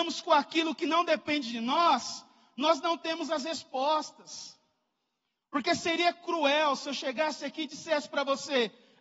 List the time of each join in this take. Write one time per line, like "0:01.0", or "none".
none